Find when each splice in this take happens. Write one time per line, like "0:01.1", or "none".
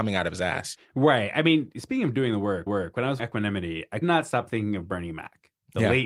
0:02.7
0:03.2
0:04.0